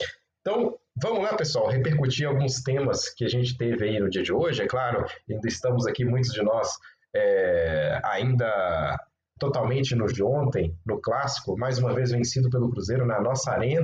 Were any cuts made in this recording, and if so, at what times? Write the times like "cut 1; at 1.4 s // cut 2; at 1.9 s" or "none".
cut 1; at 9.4 s // cut 2; at 10.1 s